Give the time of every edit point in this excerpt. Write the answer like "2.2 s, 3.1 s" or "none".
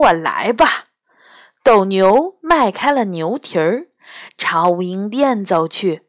none